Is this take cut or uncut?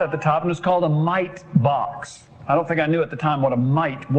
uncut